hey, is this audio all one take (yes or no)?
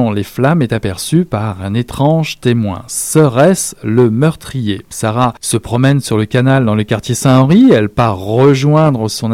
no